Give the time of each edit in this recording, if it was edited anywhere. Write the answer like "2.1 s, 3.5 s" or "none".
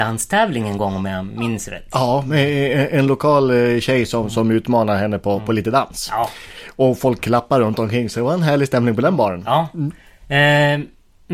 none